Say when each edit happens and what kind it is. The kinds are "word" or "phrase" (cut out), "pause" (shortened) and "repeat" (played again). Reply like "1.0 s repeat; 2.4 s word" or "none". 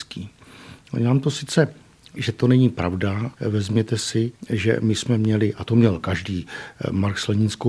2.2 s word; 3.3 s word

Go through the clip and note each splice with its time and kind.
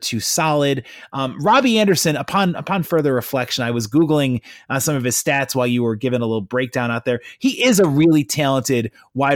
none

